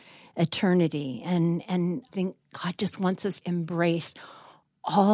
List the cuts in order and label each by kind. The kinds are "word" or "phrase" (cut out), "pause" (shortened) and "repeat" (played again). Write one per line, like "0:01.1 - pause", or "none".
0:02.1 - word
0:03.4 - word